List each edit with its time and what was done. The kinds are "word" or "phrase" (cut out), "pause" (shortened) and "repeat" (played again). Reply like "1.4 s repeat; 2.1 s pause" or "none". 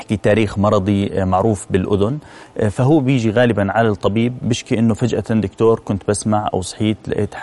none